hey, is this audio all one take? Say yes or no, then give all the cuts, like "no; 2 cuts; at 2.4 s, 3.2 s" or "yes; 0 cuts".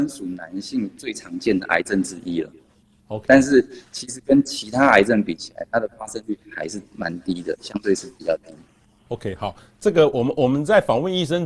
yes; 0 cuts